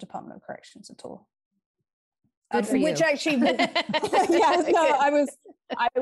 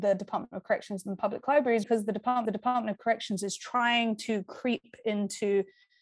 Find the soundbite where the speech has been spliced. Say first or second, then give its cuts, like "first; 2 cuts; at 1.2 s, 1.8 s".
second; 2 cuts; at 1.8 s, 2.4 s